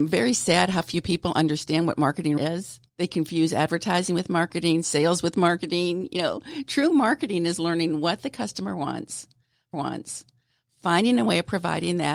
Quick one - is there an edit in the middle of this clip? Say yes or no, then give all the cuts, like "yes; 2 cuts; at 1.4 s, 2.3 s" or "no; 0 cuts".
yes; 3 cuts; at 2.4 s, 2.9 s, 9.7 s